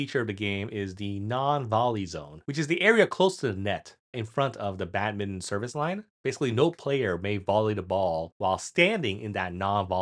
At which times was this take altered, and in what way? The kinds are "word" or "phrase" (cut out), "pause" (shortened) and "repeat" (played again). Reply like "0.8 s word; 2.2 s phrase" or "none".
4.1 s word; 6.1 s pause